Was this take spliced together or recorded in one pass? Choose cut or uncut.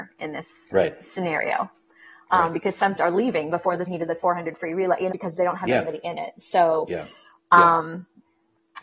cut